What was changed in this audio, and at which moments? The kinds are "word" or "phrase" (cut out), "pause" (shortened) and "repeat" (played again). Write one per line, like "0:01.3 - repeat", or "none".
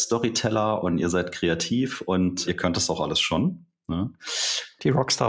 0:02.4 - word